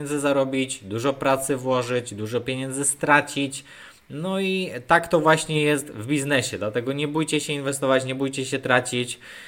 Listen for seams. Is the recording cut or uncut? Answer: uncut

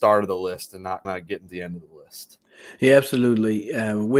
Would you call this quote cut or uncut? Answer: cut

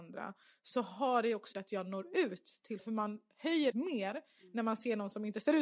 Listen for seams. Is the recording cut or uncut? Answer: cut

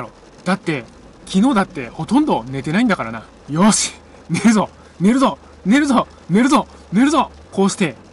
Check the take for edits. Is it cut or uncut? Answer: uncut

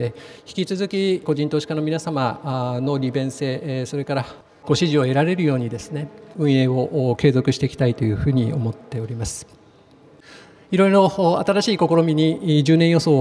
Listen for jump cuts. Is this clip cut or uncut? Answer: uncut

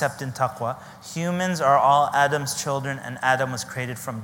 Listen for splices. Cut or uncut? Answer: uncut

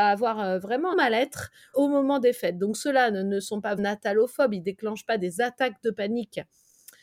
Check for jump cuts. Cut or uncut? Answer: cut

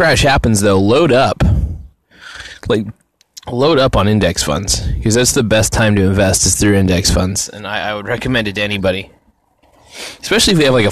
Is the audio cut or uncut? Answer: uncut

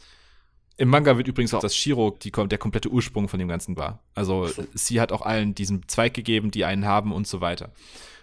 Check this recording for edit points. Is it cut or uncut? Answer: cut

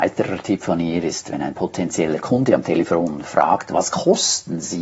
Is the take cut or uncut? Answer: uncut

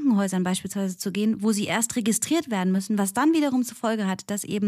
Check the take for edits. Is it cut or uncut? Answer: uncut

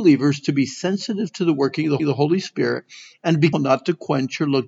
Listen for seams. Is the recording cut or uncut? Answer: cut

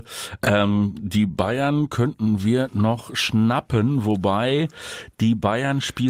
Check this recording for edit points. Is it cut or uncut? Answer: uncut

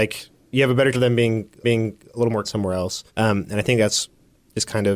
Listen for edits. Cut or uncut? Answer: cut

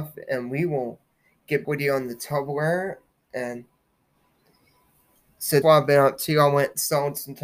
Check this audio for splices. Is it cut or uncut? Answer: cut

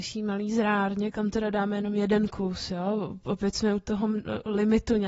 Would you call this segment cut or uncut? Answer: uncut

